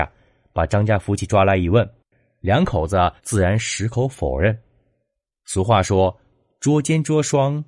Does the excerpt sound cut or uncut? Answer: cut